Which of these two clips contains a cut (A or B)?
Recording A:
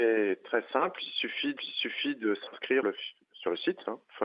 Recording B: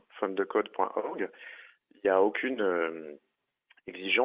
A